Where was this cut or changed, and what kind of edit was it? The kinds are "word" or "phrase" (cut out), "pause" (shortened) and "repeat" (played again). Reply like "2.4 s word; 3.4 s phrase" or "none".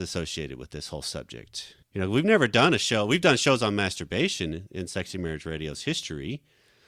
1.8 s pause